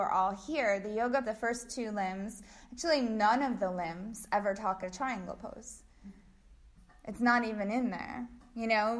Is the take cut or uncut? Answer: cut